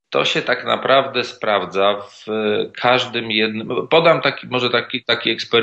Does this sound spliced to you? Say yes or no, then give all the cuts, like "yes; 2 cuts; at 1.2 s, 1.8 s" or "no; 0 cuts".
no; 0 cuts